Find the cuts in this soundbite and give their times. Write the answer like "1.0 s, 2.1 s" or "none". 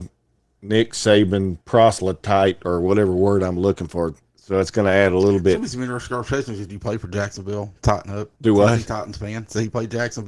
1.6 s, 8.4 s